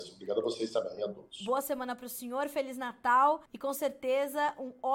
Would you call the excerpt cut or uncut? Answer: cut